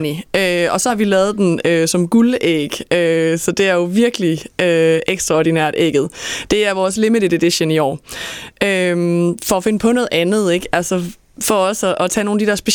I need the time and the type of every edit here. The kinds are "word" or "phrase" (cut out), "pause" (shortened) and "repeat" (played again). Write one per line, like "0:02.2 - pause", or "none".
none